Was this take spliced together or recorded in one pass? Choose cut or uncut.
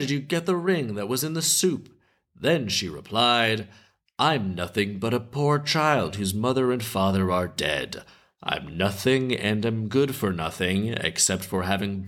uncut